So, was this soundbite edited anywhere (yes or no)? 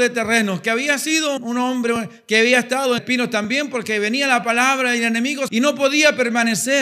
yes